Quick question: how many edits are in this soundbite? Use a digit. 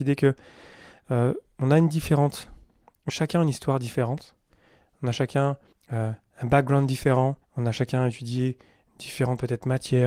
3